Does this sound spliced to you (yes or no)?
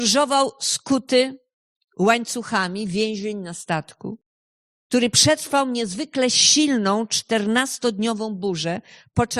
no